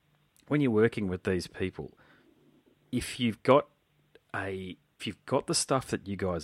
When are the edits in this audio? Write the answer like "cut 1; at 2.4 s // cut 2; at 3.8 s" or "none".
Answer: cut 1; at 5.0 s